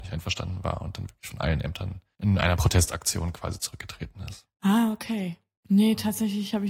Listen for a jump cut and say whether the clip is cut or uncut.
uncut